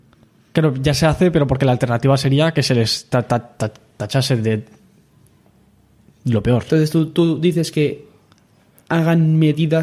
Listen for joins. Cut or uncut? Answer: uncut